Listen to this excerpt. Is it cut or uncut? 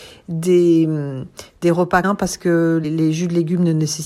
cut